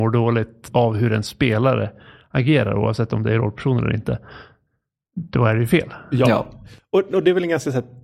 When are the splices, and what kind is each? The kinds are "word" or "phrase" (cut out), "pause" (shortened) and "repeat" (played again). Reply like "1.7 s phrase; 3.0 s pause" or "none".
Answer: none